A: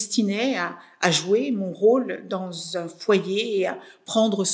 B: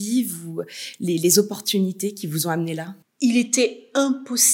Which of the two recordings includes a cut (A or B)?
B